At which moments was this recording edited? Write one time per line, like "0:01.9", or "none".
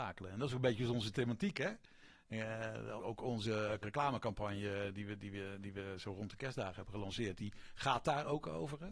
0:03.0
0:03.8